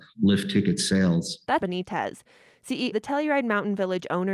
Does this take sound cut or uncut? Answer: cut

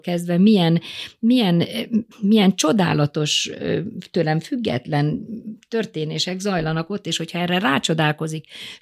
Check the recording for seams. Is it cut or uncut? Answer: cut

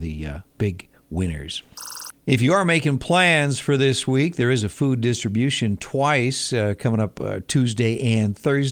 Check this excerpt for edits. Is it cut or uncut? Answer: cut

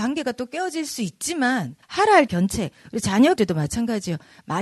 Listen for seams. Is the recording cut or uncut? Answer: cut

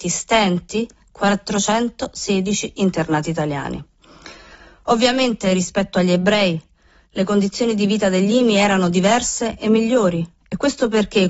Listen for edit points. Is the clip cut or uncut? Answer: uncut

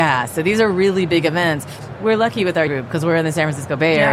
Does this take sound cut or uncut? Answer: cut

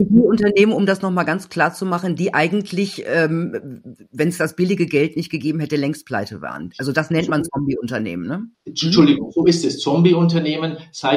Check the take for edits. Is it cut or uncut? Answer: cut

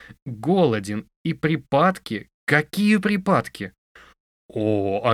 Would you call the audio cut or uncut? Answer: cut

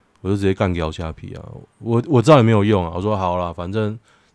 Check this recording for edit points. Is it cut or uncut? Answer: cut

